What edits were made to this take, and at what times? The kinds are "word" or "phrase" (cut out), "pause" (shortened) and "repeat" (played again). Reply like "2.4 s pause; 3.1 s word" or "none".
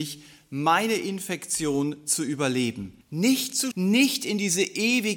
3.0 s pause; 3.7 s word